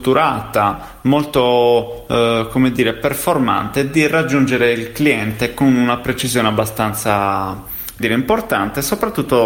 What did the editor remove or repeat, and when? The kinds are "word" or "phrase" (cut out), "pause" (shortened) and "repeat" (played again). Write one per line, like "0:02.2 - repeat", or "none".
0:08.0 - word